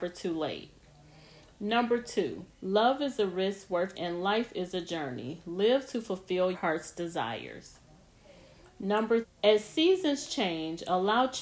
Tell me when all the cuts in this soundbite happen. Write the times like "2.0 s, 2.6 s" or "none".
2.5 s, 3.9 s, 6.5 s, 9.2 s